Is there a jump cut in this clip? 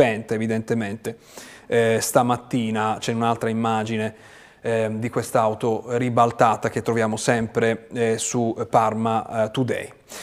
no; 0 cuts

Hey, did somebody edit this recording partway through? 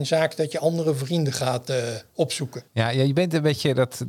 yes; 1 cut; at 2.7 s

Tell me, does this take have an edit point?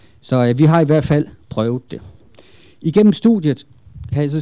no; 0 cuts

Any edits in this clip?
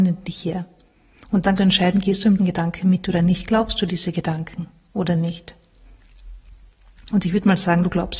yes; 2 cuts; at 1.6 s, 2.4 s

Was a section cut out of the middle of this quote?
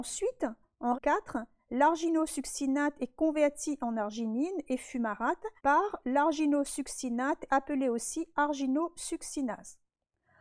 yes; 3 cuts; at 0.9 s, 5.6 s, 7.5 s

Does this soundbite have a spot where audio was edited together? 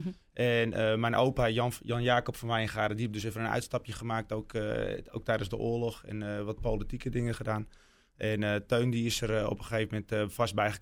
no; 0 cuts

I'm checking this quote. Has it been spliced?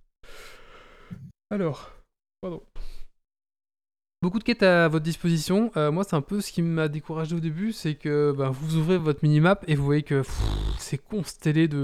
no; 0 cuts

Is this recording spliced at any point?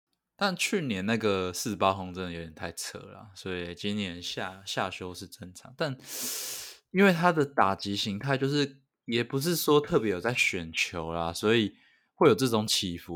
no; 0 cuts

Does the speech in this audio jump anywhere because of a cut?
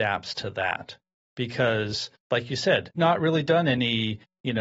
yes; 2 cuts; at 2.2 s, 3.0 s

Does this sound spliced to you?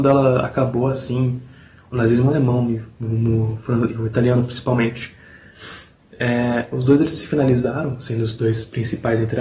no; 0 cuts

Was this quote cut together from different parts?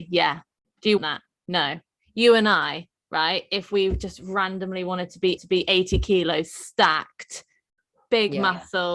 yes; 2 cuts; at 1.0 s, 5.4 s

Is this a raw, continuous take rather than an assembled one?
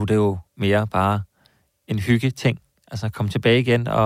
yes; 0 cuts

